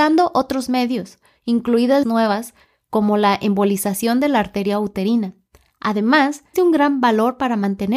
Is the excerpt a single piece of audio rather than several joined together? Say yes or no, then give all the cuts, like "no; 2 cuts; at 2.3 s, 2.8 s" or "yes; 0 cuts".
no; 2 cuts; at 2.0 s, 6.5 s